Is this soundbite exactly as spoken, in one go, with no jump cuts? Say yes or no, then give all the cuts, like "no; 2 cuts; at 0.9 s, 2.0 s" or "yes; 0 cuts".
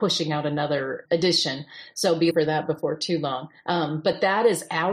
no; 3 cuts; at 1.1 s, 2.3 s, 3.6 s